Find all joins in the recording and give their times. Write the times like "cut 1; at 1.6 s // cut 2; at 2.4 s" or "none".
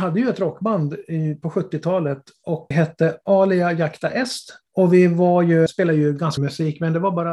cut 1; at 2.7 s // cut 2; at 4.7 s // cut 3; at 5.7 s // cut 4; at 6.4 s